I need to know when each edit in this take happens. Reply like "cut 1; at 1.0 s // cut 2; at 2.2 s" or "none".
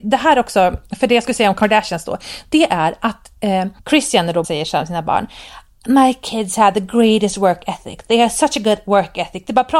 cut 1; at 3.8 s // cut 2; at 4.4 s